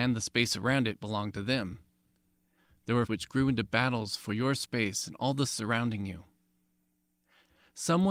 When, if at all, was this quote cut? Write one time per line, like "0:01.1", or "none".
0:03.1
0:05.5